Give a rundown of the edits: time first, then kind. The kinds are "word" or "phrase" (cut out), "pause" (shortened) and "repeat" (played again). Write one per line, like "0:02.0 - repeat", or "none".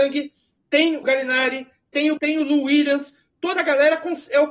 0:01.0 - word
0:02.2 - word
0:03.5 - word